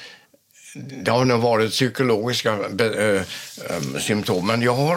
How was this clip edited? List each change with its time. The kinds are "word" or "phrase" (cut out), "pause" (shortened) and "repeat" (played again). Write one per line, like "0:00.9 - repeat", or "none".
none